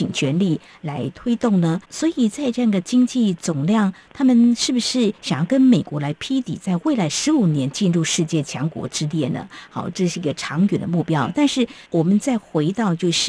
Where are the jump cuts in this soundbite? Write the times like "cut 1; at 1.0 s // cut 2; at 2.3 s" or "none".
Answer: cut 1; at 1.8 s // cut 2; at 11.9 s